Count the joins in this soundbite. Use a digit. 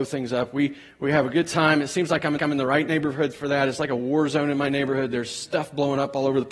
1